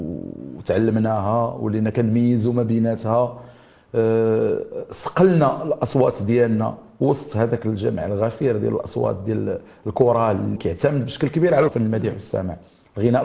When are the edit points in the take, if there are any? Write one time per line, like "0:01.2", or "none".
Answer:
0:10.6
0:11.7

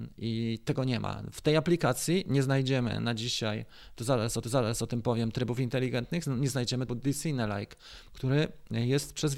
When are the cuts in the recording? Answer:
0:04.4
0:06.9

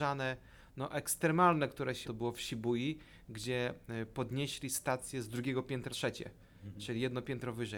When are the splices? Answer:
0:02.0
0:05.9

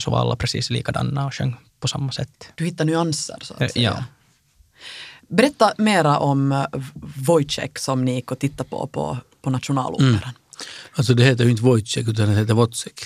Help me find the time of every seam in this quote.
0:02.5
0:10.9

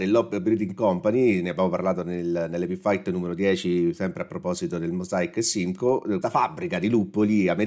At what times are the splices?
0:06.2

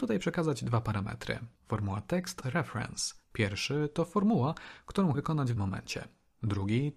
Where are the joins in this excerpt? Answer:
0:01.5
0:02.4
0:03.2
0:05.1
0:05.6

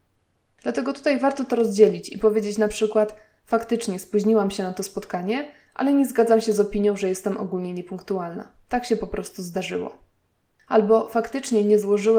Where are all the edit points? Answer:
none

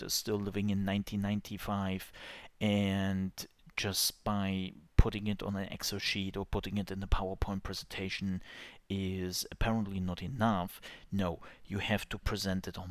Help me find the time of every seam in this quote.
none

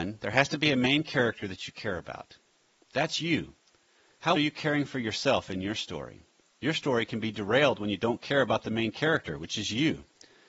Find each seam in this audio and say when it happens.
0:04.4

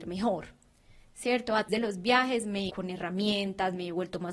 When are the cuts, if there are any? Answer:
0:01.7
0:02.7

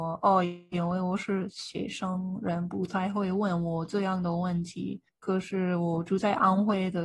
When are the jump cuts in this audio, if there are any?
0:05.1

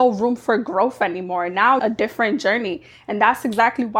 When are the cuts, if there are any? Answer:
0:01.8

